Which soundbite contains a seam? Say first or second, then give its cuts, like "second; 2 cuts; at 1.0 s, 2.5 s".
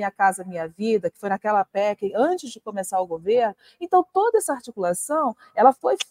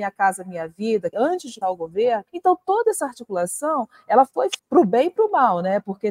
second; 4 cuts; at 1.1 s, 1.6 s, 2.3 s, 4.6 s